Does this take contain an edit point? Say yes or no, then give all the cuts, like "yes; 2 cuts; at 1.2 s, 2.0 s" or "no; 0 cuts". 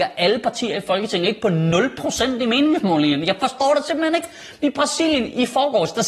no; 0 cuts